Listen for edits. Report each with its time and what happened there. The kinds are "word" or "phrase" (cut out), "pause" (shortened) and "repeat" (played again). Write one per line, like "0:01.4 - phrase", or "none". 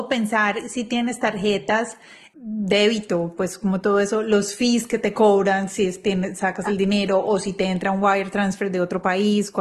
none